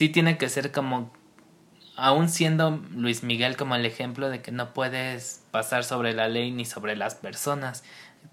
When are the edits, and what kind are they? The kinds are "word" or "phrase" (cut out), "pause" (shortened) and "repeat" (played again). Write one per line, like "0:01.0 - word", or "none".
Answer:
none